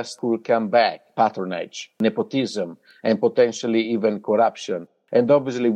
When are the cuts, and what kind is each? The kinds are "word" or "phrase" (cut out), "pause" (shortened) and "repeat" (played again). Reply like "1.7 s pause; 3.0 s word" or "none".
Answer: none